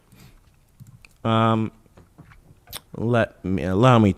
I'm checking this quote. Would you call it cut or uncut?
cut